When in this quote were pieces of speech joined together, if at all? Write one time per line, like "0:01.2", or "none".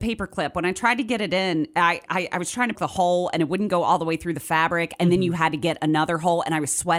0:02.1
0:02.7